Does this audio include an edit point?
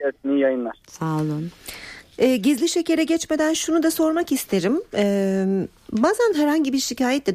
no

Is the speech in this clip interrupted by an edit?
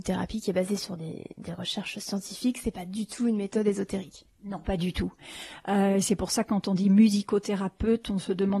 no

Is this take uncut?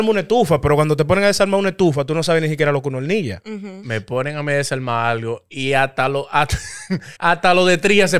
no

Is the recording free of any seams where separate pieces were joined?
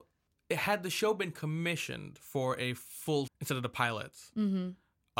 no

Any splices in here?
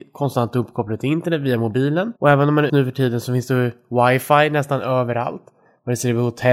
yes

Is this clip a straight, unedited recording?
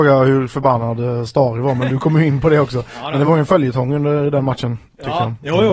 yes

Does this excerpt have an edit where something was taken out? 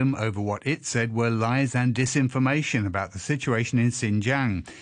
no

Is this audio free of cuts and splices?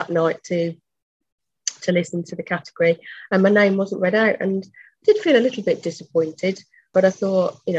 yes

